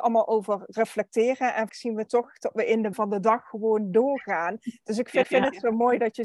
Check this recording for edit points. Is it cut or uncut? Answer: cut